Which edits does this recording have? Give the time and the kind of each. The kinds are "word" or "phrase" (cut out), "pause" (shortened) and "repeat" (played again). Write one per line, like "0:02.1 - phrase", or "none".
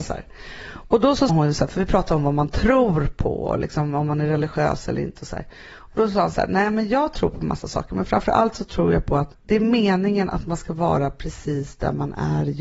0:01.3 - word